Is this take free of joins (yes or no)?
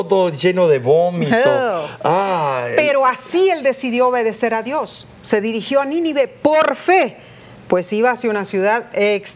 yes